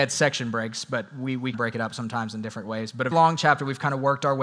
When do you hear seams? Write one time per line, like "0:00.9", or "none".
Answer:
0:01.5
0:03.1